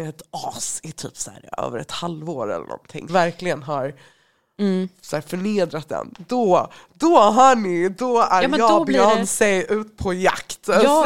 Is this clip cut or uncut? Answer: cut